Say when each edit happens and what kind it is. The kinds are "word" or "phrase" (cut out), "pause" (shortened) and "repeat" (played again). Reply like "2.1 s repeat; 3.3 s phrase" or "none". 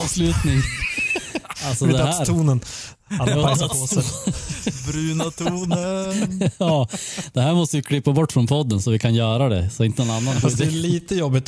3.0 s pause; 10.4 s word